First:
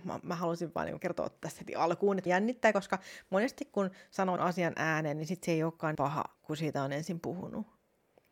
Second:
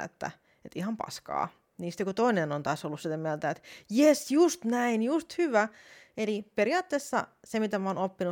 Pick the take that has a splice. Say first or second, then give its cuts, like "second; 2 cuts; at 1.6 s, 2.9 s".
first; 5 cuts; at 1.0 s, 2.3 s, 4.4 s, 5.9 s, 6.3 s